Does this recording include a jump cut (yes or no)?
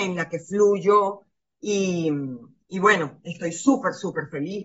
no